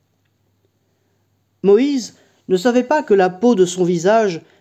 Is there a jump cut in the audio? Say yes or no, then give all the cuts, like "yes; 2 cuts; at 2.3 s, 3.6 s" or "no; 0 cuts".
no; 0 cuts